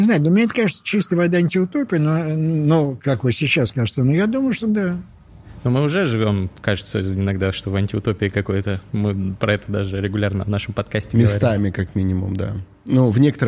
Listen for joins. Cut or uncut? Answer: uncut